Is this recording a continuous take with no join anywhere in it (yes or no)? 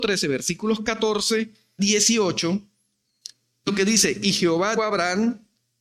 no